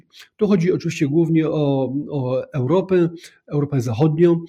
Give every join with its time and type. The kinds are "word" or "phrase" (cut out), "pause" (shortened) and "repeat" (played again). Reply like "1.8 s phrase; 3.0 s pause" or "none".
none